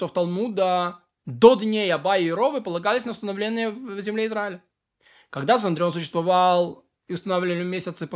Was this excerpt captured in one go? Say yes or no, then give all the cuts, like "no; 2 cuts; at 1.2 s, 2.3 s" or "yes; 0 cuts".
yes; 0 cuts